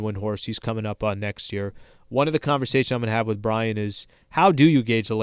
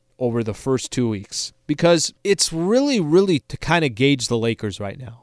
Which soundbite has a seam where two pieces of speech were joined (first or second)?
second